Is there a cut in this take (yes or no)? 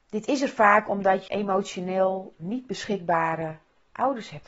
yes